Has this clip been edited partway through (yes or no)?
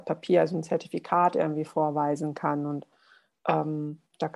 no